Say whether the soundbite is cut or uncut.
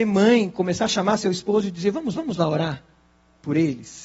cut